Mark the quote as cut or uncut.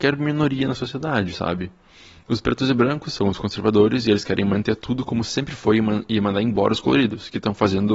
uncut